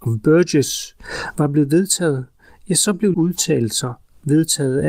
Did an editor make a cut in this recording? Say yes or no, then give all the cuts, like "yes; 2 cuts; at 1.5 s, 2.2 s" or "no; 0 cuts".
yes; 1 cut; at 3.1 s